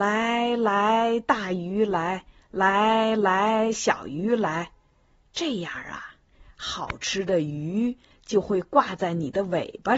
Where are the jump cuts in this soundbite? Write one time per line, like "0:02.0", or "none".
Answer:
0:04.8